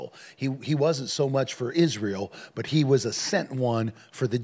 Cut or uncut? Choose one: uncut